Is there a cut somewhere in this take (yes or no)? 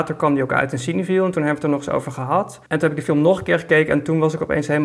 yes